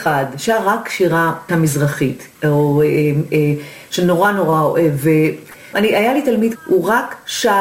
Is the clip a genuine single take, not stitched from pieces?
no; 4 cuts; at 1.5 s, 2.3 s, 5.7 s, 6.6 s

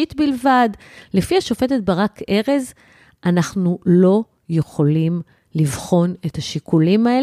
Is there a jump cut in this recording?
no; 0 cuts

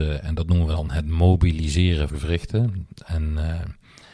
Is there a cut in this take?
yes; 1 cut; at 2.1 s

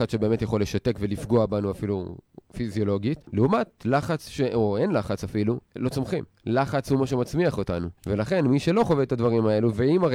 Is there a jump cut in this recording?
yes; 4 cuts; at 3.2 s, 5.7 s, 6.3 s, 8.0 s

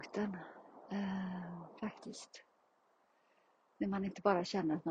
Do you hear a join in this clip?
no; 0 cuts

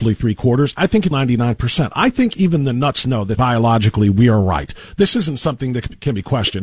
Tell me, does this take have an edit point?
yes; 2 cuts; at 1.1 s, 3.4 s

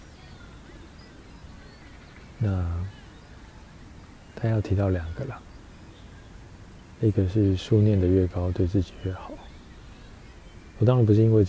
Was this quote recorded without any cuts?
no; 1 cut; at 2.3 s

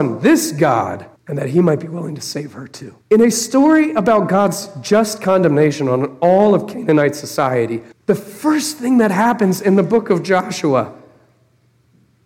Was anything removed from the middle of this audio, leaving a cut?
yes; 3 cuts; at 1.2 s, 3.0 s, 7.9 s

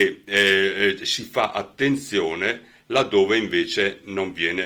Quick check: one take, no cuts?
yes; 0 cuts

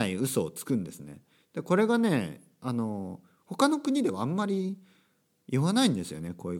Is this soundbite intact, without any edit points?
yes; 0 cuts

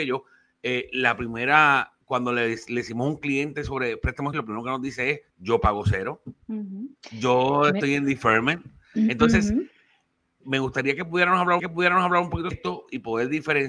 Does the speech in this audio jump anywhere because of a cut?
yes; 8 cuts; at 2.0 s, 4.3 s, 5.3 s, 6.4 s, 7.0 s, 10.4 s, 11.6 s, 12.5 s

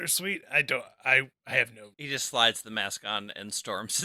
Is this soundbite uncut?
no; 2 cuts; at 1.3 s, 1.9 s

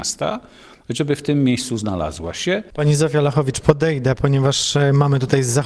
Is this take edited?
no; 0 cuts

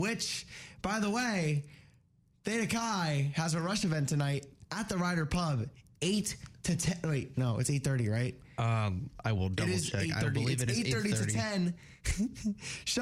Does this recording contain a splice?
no; 0 cuts

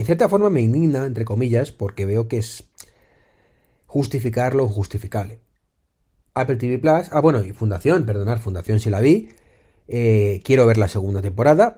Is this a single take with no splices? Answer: yes; 0 cuts

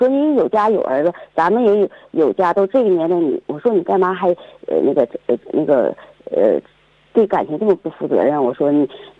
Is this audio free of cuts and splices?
yes; 0 cuts

